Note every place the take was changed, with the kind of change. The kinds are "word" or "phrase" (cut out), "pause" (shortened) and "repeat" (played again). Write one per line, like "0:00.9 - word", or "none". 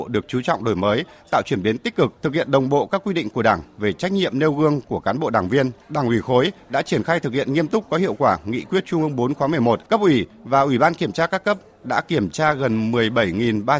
0:02.2 - pause
0:05.8 - pause
0:09.8 - pause